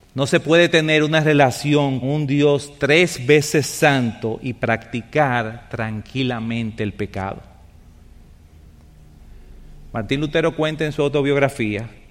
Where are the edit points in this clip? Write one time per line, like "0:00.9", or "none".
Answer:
0:02.0